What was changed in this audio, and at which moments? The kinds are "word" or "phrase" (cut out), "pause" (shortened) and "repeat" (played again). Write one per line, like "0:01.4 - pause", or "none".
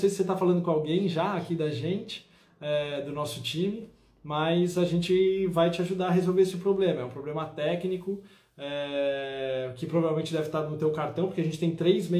none